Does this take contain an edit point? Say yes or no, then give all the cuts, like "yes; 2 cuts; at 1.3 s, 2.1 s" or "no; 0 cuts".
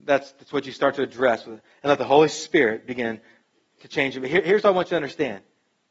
no; 0 cuts